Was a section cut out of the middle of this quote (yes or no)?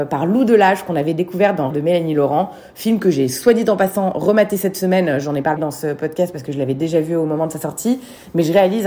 yes